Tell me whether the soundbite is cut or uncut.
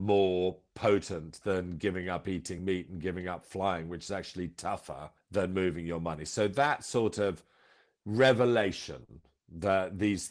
uncut